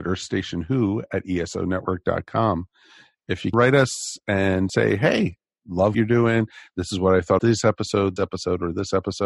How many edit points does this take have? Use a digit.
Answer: 5